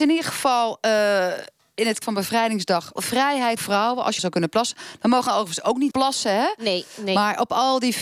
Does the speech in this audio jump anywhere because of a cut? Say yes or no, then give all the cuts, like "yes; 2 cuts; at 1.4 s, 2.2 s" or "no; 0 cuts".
yes; 6 cuts; at 2.0 s, 3.0 s, 3.6 s, 4.2 s, 5.3 s, 5.9 s